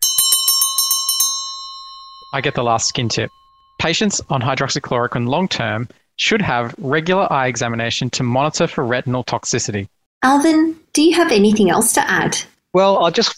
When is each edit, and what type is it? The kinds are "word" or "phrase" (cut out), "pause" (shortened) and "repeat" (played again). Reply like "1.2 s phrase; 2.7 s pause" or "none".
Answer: none

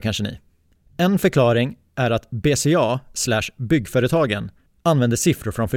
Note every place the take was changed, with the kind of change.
none

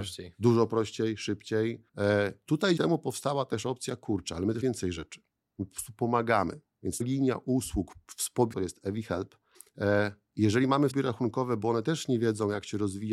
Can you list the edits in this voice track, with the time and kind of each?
1.9 s pause; 2.8 s word; 4.6 s word; 7.0 s word; 8.5 s phrase; 9.5 s pause; 10.9 s word

